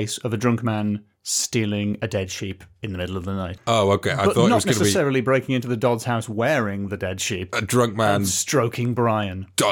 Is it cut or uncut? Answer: uncut